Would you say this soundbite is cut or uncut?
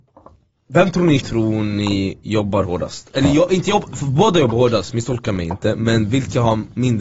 cut